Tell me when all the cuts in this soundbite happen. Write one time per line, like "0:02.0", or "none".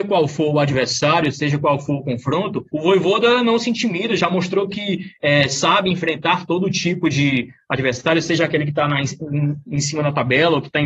0:02.7